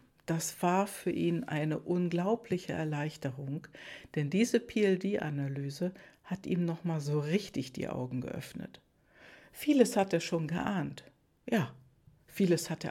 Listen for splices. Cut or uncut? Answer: uncut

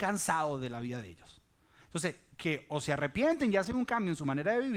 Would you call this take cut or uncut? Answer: uncut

